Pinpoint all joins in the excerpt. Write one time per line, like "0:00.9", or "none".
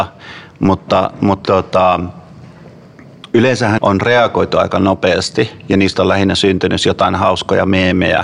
0:01.4
0:03.8
0:06.8